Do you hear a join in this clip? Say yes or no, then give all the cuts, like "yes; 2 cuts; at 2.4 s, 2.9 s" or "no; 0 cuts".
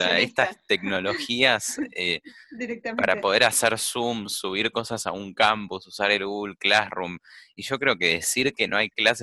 no; 0 cuts